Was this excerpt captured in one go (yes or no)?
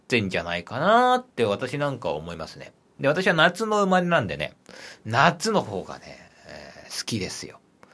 no